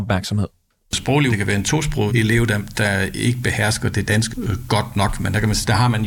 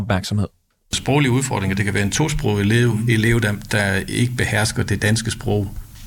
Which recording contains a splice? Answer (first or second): first